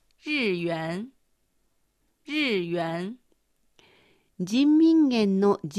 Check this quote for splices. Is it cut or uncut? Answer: uncut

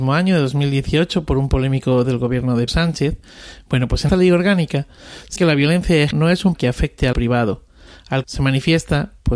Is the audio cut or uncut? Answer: cut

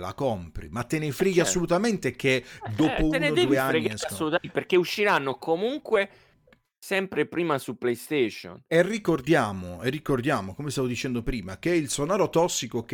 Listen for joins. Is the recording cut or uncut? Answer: uncut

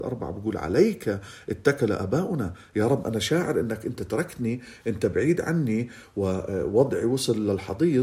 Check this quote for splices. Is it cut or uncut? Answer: uncut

